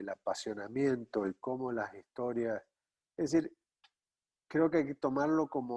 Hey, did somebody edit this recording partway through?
no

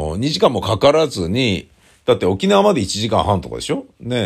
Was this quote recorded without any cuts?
yes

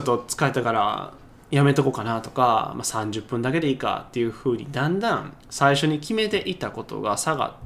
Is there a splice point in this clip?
yes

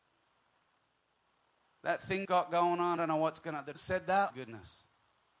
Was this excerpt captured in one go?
no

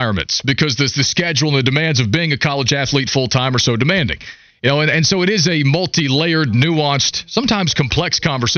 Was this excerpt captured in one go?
yes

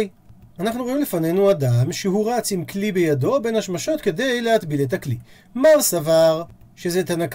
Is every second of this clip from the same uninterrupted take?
yes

